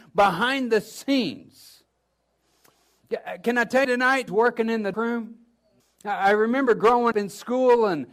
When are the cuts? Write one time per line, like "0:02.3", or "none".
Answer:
0:03.8
0:04.3
0:04.9
0:05.8
0:07.1